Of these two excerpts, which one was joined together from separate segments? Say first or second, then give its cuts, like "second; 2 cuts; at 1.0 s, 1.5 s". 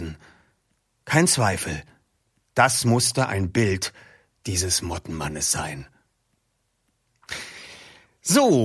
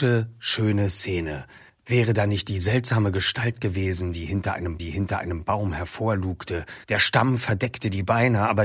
second; 3 cuts; at 1.7 s, 4.8 s, 6.8 s